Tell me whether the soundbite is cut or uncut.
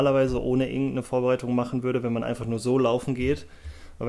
uncut